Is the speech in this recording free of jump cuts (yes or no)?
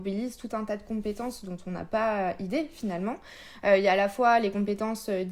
yes